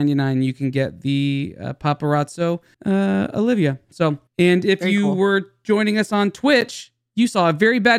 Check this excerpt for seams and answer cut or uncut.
cut